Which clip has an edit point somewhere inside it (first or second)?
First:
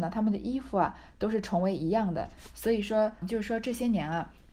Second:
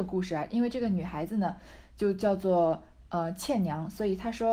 first